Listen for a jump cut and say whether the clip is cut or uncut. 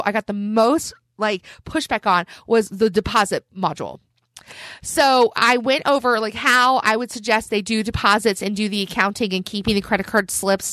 uncut